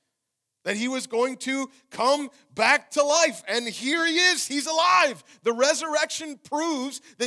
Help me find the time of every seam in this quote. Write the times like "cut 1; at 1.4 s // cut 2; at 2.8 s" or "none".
none